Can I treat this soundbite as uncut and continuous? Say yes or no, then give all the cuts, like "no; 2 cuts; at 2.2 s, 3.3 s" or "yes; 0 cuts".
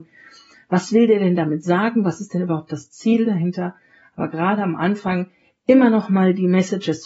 yes; 0 cuts